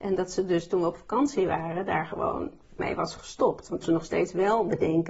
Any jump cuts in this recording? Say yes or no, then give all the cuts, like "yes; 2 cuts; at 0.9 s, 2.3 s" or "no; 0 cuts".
yes; 2 cuts; at 2.8 s, 3.8 s